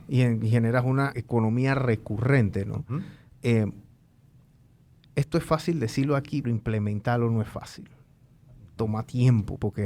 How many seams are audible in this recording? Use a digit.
2